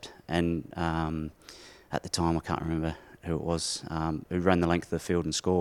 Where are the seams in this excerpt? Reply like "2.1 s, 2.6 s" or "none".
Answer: none